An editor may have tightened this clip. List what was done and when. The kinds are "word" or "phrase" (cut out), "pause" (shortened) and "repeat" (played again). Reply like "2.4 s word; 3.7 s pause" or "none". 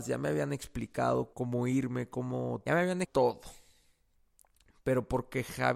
1.3 s word; 2.7 s phrase; 3.0 s word